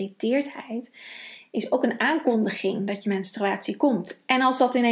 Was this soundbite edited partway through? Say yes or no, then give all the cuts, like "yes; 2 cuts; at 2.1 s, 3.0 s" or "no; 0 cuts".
no; 0 cuts